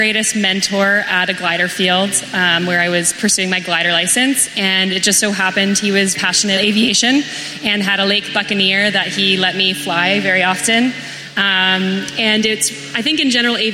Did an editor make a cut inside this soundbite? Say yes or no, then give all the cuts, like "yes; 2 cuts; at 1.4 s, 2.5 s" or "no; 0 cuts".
yes; 2 cuts; at 6.1 s, 6.6 s